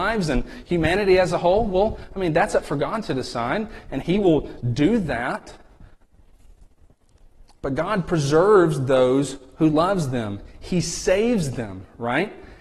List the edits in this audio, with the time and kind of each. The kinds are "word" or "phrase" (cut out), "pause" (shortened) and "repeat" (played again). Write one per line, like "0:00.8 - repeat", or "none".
none

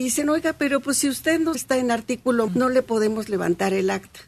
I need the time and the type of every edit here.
0:01.5 - phrase
0:02.5 - word

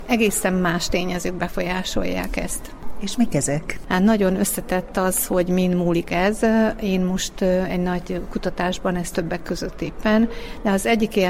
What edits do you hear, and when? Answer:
0:09.1 - word

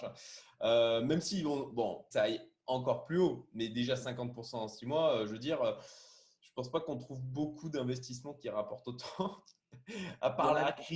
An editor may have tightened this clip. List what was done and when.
0:02.1 - phrase

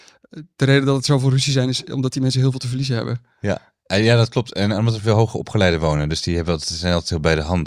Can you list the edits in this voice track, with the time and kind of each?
none

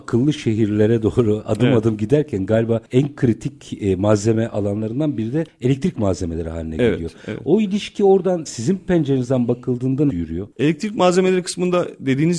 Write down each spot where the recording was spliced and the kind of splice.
0:08.5 - word
0:10.1 - word

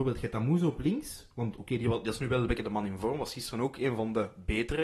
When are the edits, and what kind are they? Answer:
none

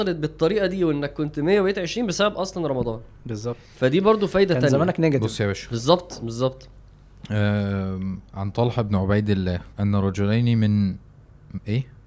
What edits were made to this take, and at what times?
0:03.6 - pause
0:09.7 - pause

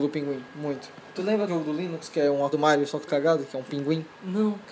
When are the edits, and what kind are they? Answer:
0:01.1 - pause
0:01.5 - word
0:02.5 - word
0:03.1 - word

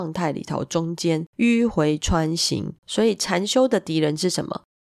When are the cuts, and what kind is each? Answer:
0:01.3 - pause
0:02.8 - pause

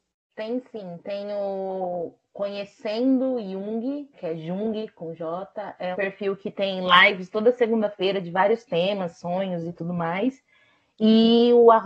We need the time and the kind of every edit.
0:04.1 - word
0:05.9 - word

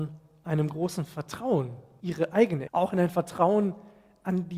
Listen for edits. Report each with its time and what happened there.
0:02.0 - word
0:02.7 - word

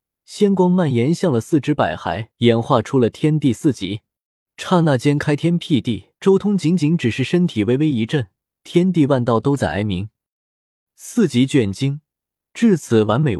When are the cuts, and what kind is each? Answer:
0:02.3 - pause
0:06.2 - pause
0:08.4 - pause

